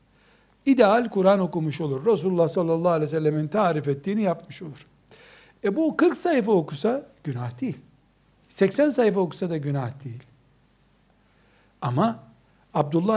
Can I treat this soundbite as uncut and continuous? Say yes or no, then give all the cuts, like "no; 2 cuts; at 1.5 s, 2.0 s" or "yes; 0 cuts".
yes; 0 cuts